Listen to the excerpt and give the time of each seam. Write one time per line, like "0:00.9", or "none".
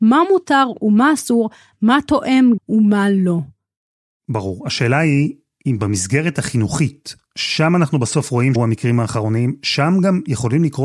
0:02.6
0:08.5